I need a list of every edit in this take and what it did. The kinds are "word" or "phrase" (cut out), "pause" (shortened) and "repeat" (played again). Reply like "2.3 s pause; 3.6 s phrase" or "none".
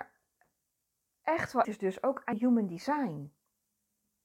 1.6 s word; 2.3 s word